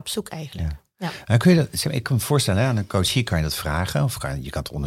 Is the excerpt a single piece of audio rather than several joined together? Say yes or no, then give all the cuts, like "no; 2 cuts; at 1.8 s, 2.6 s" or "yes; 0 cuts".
yes; 0 cuts